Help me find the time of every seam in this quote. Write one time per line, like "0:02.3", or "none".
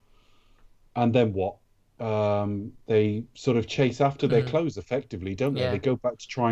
0:01.7
0:03.3